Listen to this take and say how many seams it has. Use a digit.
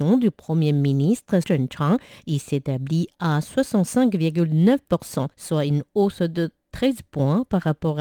2